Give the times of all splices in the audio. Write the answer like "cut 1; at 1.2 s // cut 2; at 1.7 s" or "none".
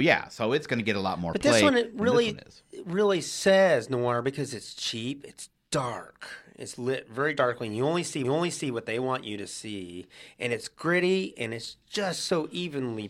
cut 1; at 8.2 s